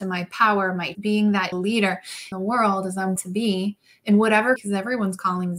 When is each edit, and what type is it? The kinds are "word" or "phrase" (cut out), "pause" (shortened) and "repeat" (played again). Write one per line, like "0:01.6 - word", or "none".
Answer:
0:00.9 - word
0:01.5 - word
0:02.3 - word
0:03.2 - word
0:04.6 - word